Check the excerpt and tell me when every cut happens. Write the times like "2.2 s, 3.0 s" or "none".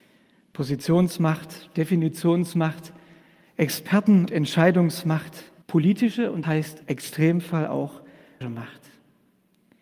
4.3 s, 5.6 s, 6.4 s, 6.8 s, 8.4 s

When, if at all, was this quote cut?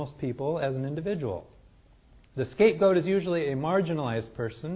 none

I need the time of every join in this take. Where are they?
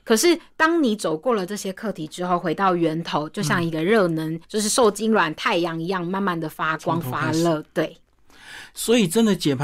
4.4 s

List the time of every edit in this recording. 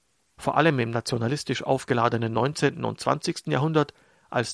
none

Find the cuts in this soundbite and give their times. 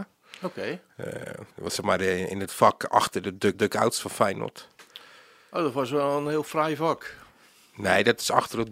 1.5 s, 3.5 s

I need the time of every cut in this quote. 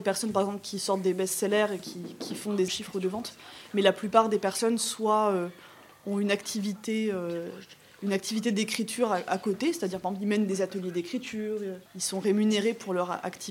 2.7 s, 11.9 s

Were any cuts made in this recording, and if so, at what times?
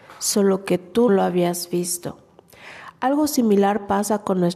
1.1 s

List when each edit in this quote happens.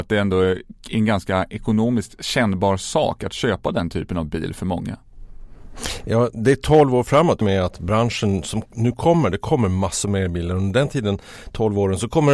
7.4 s

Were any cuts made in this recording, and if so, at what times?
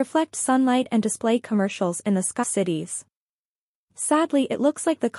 2.4 s

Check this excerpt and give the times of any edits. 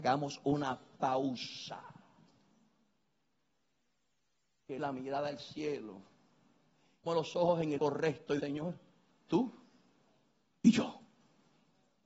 4.8 s, 7.1 s, 7.8 s, 8.4 s, 9.3 s

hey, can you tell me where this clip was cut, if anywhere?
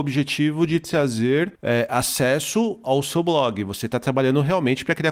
1.5 s

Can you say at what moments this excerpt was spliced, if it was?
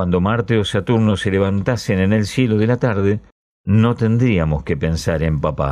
none

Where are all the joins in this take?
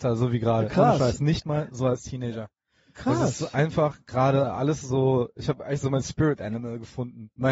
none

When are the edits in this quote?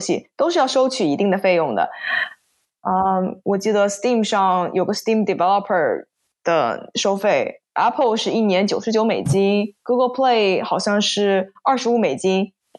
none

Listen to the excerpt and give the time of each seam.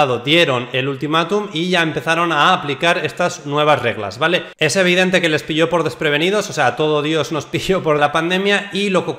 8.0 s

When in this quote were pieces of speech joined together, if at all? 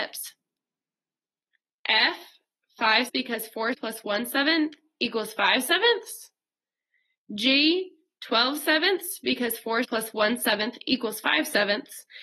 3.1 s, 3.7 s, 9.8 s

